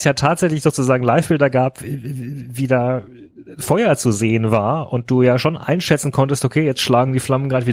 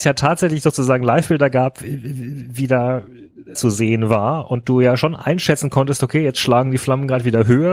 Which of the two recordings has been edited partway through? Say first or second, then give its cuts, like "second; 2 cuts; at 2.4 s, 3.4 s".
second; 1 cut; at 3.5 s